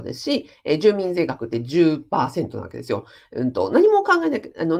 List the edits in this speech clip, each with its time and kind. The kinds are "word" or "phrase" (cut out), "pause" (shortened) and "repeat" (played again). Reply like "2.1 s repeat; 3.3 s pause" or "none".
none